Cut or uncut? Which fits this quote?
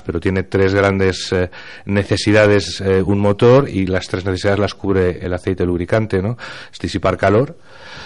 uncut